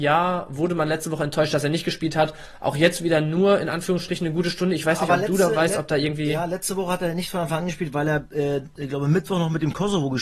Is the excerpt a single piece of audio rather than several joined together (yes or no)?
yes